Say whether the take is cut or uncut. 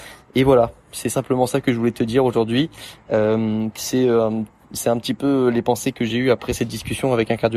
uncut